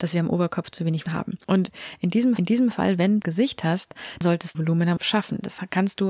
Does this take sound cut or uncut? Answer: cut